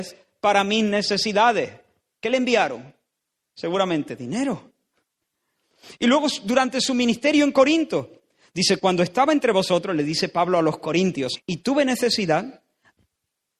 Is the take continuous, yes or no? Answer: no